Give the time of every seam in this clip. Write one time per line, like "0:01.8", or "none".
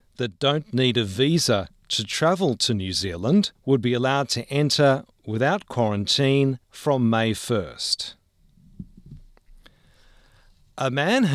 0:03.5
0:06.6

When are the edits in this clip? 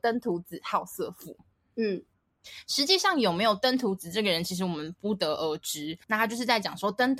0:06.0

